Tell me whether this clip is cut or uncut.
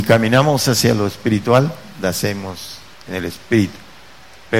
cut